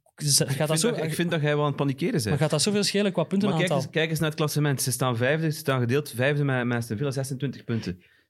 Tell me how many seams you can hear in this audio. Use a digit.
0